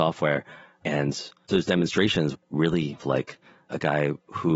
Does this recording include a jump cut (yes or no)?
yes